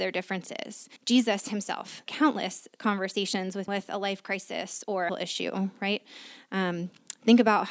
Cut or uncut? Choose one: cut